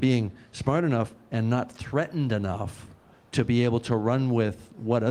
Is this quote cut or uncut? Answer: uncut